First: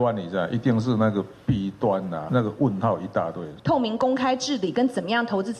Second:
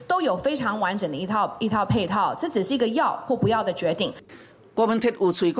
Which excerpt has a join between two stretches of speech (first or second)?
first